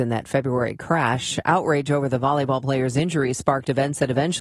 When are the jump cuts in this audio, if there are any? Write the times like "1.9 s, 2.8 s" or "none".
none

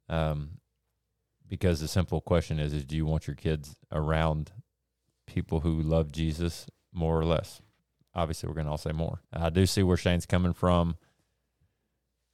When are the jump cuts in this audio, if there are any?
4.8 s, 7.8 s, 9.2 s

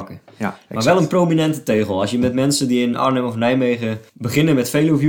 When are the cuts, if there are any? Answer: 4.1 s

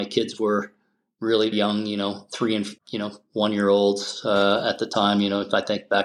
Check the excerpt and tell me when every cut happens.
1.5 s, 2.8 s

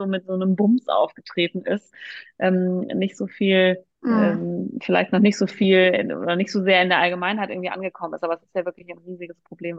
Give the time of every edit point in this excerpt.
3.9 s

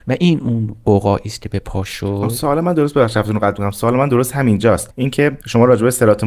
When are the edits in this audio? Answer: none

